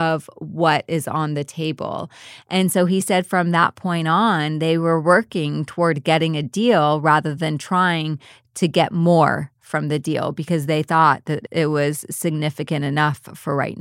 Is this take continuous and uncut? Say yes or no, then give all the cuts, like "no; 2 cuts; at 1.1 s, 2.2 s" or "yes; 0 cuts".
yes; 0 cuts